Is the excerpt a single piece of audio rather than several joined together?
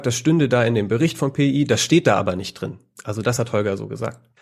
yes; 0 cuts

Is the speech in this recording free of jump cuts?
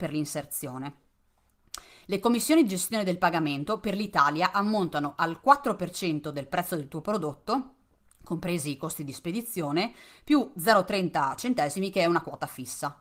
yes; 0 cuts

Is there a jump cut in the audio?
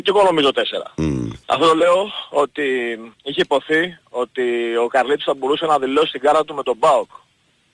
yes; 2 cuts; at 1.4 s, 3.1 s

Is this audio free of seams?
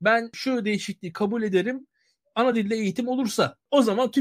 yes; 0 cuts

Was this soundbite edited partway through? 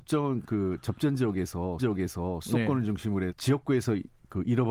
yes; 2 cuts; at 1.8 s, 3.3 s

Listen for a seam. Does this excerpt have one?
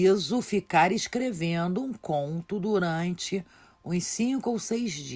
no; 0 cuts

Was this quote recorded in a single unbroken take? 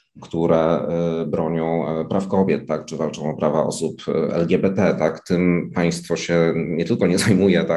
yes; 0 cuts

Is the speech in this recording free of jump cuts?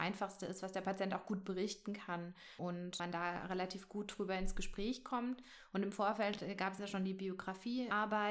yes; 0 cuts

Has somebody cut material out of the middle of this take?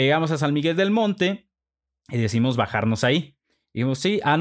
no; 0 cuts

